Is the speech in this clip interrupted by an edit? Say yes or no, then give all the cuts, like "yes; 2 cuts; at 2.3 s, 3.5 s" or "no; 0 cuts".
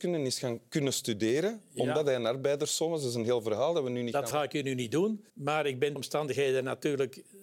yes; 3 cuts; at 4.3 s, 5.3 s, 6.0 s